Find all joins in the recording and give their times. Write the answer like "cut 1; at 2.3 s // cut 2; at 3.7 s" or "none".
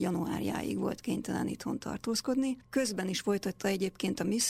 none